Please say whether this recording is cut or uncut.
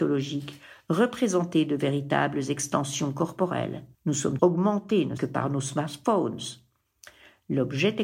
cut